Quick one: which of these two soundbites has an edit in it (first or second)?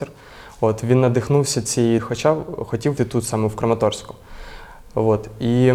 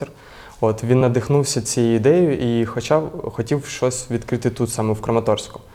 first